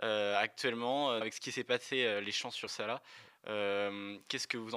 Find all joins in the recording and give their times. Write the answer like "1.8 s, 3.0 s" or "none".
1.2 s, 2.7 s